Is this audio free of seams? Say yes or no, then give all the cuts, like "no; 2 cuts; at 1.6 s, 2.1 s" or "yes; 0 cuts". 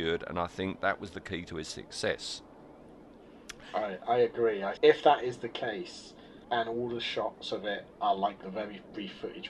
no; 4 cuts; at 4.8 s, 6.4 s, 7.9 s, 8.4 s